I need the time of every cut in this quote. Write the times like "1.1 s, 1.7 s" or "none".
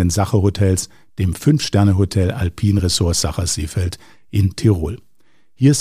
none